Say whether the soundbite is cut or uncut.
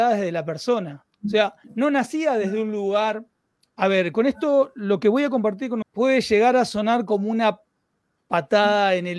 cut